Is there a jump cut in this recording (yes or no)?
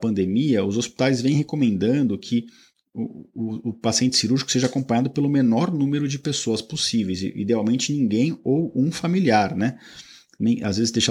no